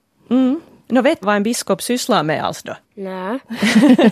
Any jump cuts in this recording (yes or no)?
yes